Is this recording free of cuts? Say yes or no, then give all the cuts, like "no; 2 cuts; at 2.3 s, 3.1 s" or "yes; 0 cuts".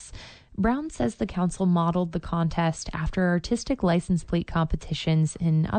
yes; 0 cuts